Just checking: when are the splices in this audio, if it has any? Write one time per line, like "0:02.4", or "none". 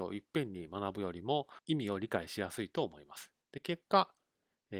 0:03.4